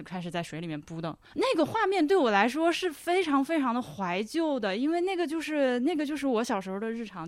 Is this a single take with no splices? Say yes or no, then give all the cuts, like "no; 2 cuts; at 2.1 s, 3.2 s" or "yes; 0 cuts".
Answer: no; 1 cut; at 1.2 s